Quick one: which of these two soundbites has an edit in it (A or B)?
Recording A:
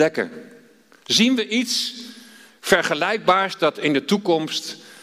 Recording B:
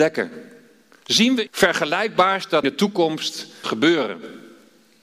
B